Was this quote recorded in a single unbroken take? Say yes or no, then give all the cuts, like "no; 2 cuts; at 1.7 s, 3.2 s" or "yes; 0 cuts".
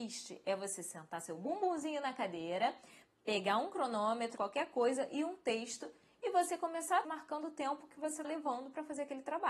no; 3 cuts; at 4.4 s, 7.0 s, 8.2 s